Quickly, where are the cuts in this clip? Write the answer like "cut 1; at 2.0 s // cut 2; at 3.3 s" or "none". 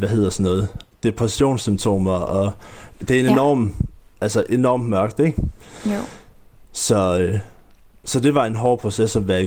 none

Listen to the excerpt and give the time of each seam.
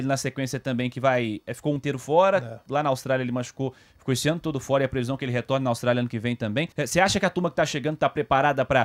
cut 1; at 1.8 s // cut 2; at 6.7 s

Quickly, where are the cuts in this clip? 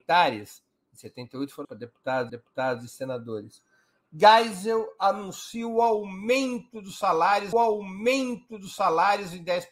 cut 1; at 1.6 s // cut 2; at 2.3 s // cut 3; at 7.5 s

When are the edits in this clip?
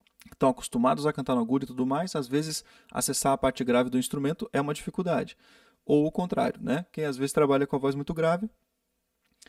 none

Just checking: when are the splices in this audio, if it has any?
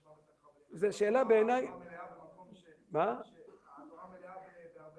none

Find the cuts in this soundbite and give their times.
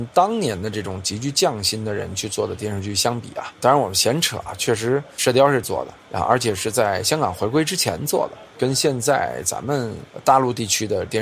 cut 1; at 5.6 s

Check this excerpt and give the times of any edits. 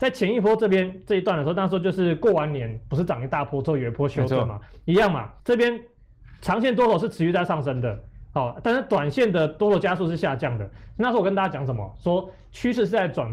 cut 1; at 5.4 s

